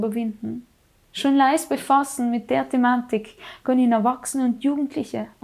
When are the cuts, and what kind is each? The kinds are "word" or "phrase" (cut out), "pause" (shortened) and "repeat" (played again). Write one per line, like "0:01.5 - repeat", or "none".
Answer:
none